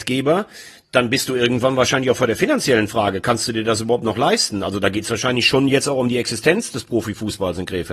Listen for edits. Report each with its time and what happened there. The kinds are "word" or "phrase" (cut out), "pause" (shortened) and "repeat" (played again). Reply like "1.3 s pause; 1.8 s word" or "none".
none